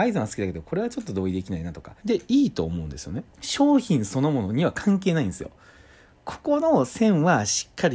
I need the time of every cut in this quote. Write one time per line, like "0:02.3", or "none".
0:02.0
0:03.3